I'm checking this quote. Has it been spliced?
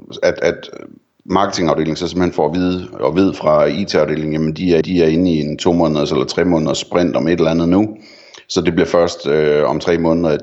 yes; 1 cut; at 4.8 s

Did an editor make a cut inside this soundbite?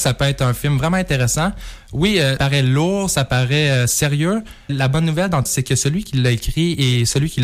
yes; 3 cuts; at 2.4 s, 4.7 s, 5.5 s

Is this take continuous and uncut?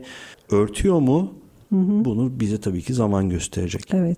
yes; 0 cuts

